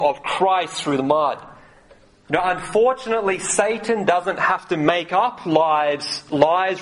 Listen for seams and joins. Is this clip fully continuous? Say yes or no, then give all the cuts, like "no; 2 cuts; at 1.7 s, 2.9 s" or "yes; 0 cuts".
yes; 0 cuts